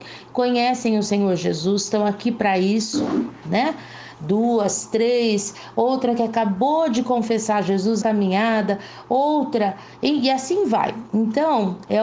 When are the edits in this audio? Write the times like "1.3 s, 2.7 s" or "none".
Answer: 8.0 s

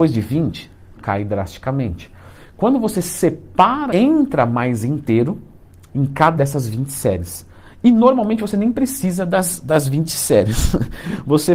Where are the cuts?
1.0 s, 3.9 s, 6.4 s

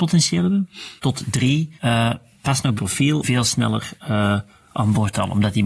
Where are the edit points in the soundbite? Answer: 1.0 s, 1.8 s, 2.8 s, 3.2 s

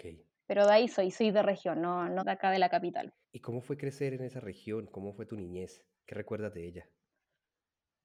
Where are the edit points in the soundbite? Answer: 2.2 s, 3.2 s

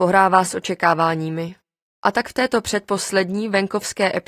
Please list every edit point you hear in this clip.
none

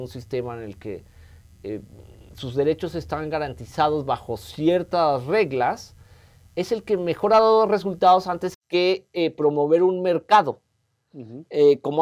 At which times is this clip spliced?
none

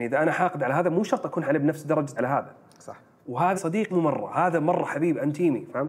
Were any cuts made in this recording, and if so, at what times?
1.4 s, 2.2 s, 3.5 s, 3.9 s

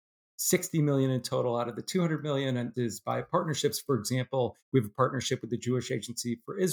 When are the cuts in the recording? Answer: 2.7 s, 4.6 s

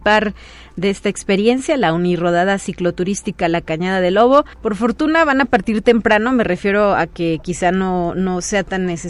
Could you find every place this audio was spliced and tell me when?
4.5 s

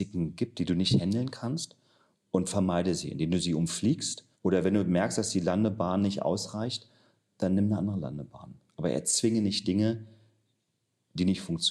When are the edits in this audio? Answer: 4.3 s

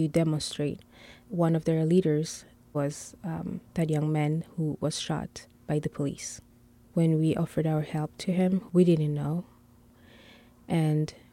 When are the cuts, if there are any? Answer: 3.7 s, 5.5 s, 6.5 s

